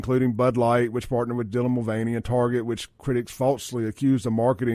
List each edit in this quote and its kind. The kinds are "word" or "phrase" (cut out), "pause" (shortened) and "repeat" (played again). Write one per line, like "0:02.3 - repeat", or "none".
none